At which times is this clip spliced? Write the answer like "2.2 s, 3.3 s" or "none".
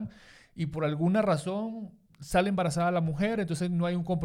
2.1 s